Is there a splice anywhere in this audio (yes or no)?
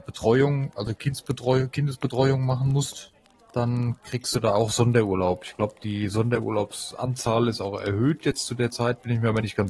no